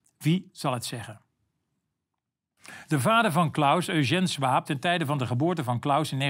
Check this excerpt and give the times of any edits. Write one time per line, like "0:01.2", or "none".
0:04.7

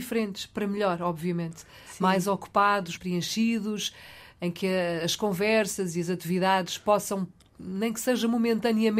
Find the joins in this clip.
0:03.0

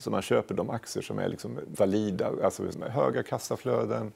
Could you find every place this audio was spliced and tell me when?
0:01.7
0:02.7

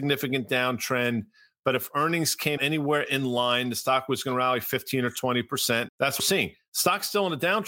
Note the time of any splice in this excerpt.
0:02.6
0:05.9
0:06.2

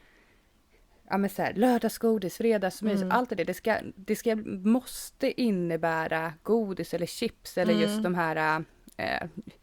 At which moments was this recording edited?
none

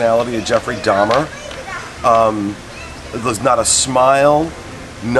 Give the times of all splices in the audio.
none

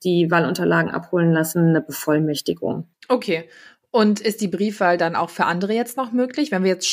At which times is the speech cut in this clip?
none

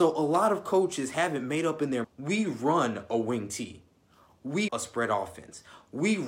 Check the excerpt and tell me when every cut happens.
0:02.0
0:04.7

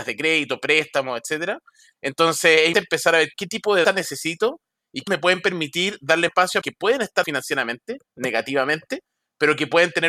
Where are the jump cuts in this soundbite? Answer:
0:02.7
0:03.3
0:03.8
0:05.1
0:06.3
0:06.6
0:07.2

